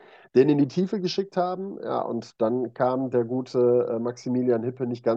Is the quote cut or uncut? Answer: uncut